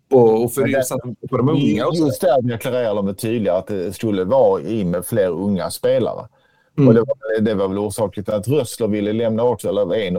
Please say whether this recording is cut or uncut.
uncut